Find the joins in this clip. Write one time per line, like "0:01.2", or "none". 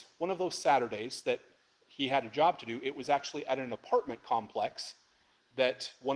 none